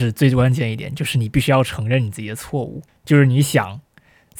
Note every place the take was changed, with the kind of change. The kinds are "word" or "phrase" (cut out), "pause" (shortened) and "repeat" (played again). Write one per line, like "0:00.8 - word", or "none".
0:02.9 - pause